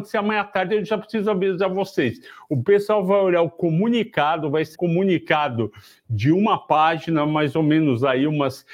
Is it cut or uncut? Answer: cut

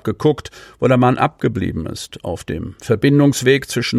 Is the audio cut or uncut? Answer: uncut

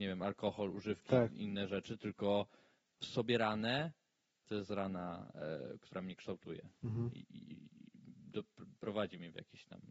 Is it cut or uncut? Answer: cut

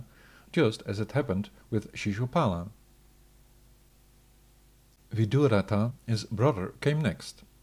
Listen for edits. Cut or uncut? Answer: uncut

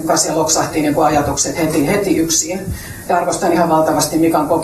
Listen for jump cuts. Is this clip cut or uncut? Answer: uncut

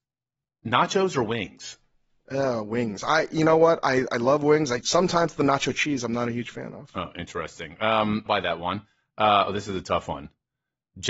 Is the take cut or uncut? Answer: cut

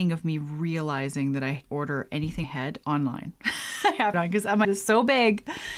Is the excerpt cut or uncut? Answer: cut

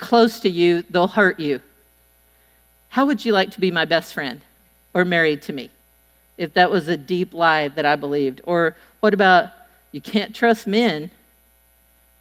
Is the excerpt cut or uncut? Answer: uncut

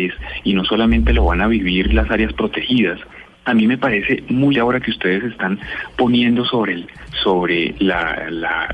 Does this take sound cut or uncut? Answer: cut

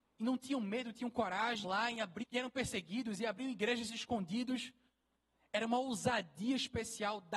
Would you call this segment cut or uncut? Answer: cut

